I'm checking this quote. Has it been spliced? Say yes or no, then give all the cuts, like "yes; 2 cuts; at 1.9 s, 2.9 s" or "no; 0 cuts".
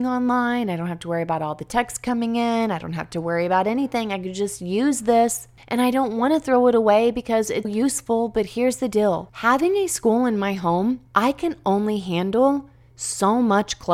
yes; 2 cuts; at 7.6 s, 11.1 s